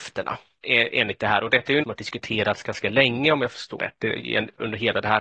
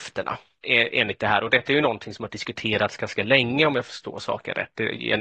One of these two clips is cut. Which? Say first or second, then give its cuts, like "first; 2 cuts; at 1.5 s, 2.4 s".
first; 2 cuts; at 1.8 s, 3.8 s